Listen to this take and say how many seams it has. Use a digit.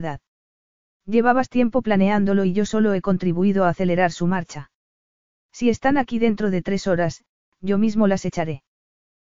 0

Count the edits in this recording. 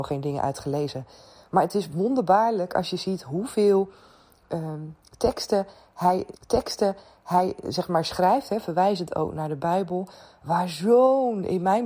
1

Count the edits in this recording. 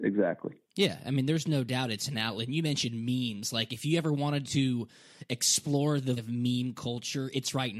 1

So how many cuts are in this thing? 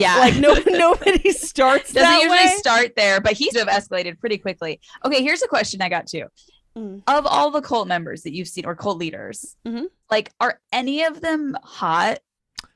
1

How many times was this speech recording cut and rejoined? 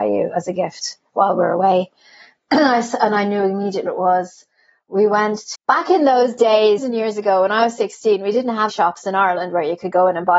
4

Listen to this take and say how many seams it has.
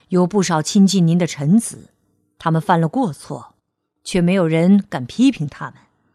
0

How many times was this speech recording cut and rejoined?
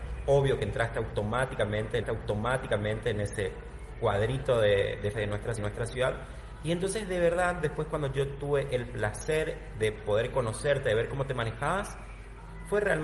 3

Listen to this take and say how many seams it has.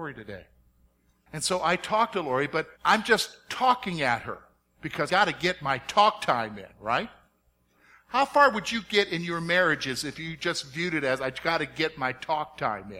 2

